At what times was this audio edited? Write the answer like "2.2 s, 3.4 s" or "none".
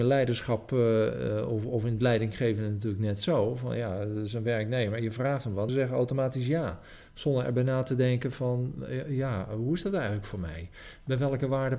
5.7 s